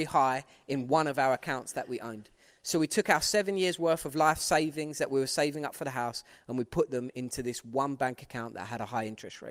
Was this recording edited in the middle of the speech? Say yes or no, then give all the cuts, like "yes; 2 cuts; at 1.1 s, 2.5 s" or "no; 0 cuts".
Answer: no; 0 cuts